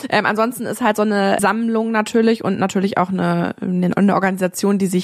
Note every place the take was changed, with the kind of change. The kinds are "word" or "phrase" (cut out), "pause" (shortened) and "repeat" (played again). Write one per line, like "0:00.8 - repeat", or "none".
none